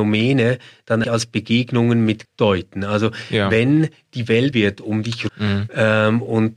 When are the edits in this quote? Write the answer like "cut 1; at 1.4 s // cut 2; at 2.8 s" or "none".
cut 1; at 1.0 s // cut 2; at 2.2 s // cut 3; at 4.5 s // cut 4; at 5.3 s